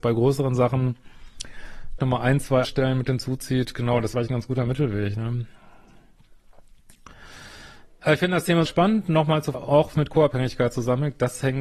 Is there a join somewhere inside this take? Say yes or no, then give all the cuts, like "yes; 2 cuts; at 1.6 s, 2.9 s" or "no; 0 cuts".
yes; 6 cuts; at 2.0 s, 2.6 s, 4.1 s, 8.7 s, 9.5 s, 9.9 s